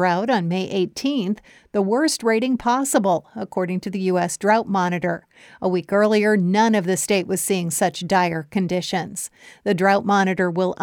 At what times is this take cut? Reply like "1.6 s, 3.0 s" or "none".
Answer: none